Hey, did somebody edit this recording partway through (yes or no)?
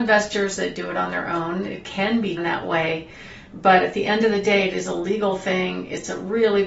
yes